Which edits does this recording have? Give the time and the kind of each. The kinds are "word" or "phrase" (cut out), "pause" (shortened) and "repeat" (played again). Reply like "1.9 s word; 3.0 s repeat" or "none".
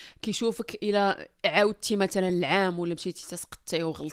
none